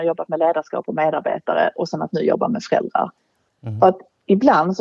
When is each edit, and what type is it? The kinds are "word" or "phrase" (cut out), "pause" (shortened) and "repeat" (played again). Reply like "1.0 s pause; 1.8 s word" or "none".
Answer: none